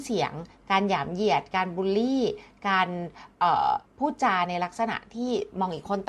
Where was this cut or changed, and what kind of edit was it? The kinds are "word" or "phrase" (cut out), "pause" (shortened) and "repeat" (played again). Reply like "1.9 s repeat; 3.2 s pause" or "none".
3.9 s pause